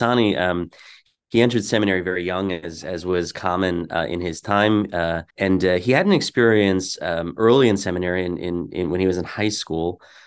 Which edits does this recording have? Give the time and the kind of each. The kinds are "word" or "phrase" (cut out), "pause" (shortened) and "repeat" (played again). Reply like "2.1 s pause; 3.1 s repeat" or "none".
5.3 s pause